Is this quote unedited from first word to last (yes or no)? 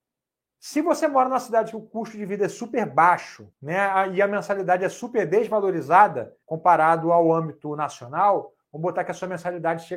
no